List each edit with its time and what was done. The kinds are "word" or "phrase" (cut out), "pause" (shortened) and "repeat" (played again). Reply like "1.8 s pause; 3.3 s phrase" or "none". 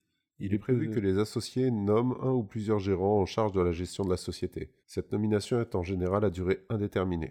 4.8 s pause